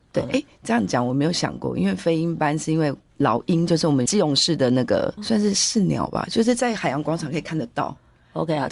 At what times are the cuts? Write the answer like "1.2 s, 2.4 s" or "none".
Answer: 5.2 s

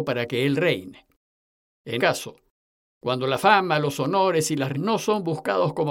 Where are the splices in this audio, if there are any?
2.0 s, 4.7 s

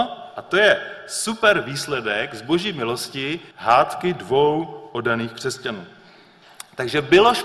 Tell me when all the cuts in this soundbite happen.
3.5 s

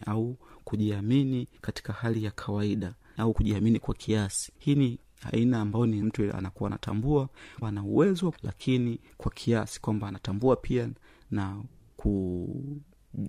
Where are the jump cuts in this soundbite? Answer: 1.6 s, 3.2 s, 4.6 s, 6.0 s, 7.6 s, 8.3 s

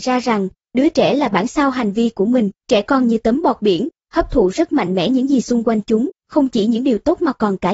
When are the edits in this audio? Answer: 2.6 s, 6.1 s

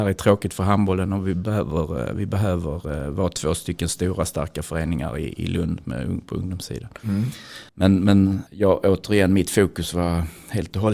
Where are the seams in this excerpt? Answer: 7.7 s, 8.5 s

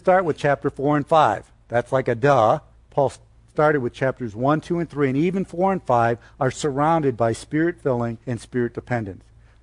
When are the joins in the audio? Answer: 2.7 s, 8.2 s

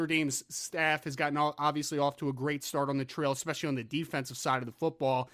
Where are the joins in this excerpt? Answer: none

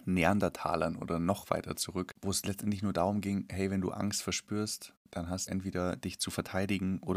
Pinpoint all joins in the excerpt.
5.0 s, 5.5 s

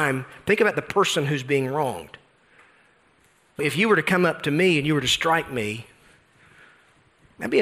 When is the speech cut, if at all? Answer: 3.6 s

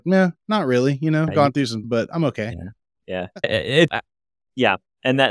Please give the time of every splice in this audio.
1.3 s, 1.8 s, 3.4 s, 3.9 s

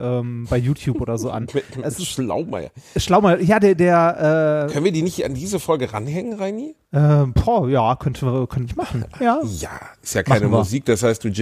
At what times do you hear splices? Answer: 6.8 s, 8.7 s

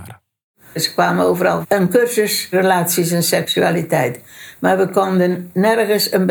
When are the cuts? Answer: 1.6 s

